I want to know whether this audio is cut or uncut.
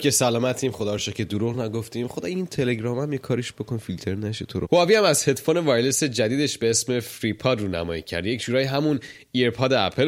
uncut